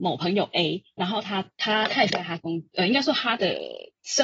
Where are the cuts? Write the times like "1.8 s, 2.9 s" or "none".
2.1 s